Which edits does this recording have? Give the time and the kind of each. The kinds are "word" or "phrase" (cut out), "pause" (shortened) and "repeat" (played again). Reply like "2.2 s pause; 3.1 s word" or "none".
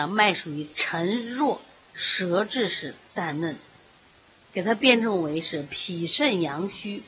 none